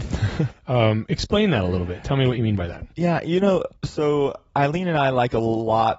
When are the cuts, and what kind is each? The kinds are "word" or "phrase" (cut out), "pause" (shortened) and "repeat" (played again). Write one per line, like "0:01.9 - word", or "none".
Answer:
0:02.9 - pause
0:03.8 - pause